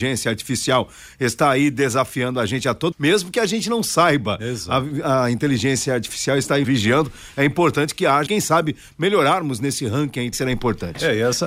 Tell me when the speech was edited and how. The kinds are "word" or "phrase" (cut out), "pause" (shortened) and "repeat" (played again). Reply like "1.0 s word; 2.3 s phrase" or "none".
2.9 s word; 6.6 s word; 8.3 s word; 10.3 s word